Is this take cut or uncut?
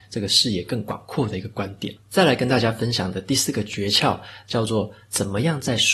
cut